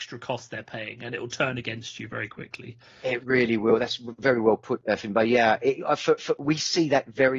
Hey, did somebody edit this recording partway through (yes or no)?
no